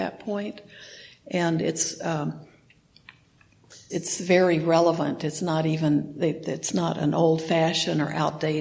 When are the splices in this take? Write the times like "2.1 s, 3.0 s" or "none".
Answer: 3.9 s